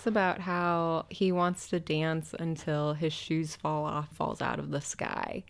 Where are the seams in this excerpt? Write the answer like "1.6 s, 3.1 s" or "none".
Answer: 1.1 s, 4.1 s